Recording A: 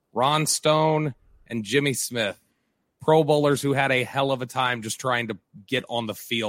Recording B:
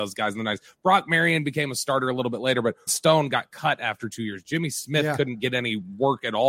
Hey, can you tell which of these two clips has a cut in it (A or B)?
B